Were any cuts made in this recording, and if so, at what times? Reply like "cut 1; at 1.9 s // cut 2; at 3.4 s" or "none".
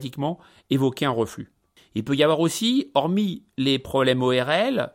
none